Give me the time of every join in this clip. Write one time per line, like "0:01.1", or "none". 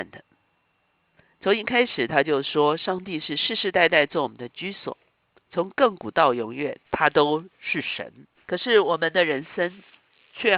0:06.9
0:08.3